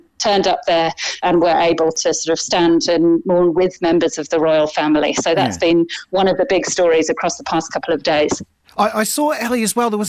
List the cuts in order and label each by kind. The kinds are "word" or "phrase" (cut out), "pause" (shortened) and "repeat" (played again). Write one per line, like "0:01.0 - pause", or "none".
0:01.2 - word